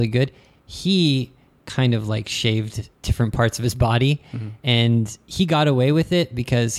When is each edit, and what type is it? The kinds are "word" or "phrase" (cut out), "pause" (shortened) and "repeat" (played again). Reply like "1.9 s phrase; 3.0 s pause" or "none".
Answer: 3.0 s pause